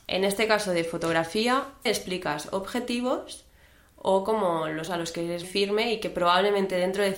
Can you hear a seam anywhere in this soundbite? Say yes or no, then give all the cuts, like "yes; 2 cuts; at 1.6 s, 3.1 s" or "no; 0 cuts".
yes; 3 cuts; at 1.9 s, 4.9 s, 5.4 s